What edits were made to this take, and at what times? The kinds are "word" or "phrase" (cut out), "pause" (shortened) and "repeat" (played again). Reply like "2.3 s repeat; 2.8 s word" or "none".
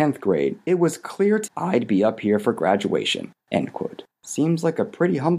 1.5 s word; 3.4 s pause; 4.1 s pause